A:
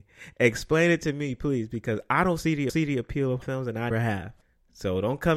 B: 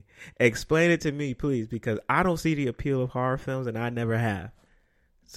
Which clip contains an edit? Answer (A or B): A